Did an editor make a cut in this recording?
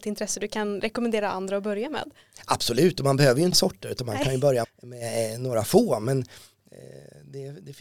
yes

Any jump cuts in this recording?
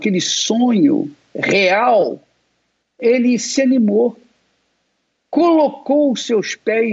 no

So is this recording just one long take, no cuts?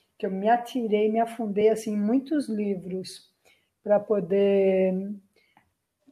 yes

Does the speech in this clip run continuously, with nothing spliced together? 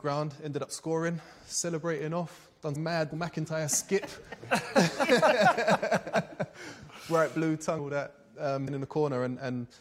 no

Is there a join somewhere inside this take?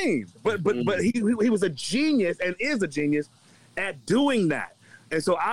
no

